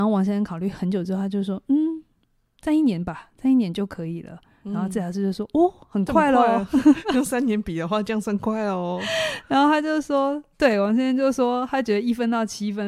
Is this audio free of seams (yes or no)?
yes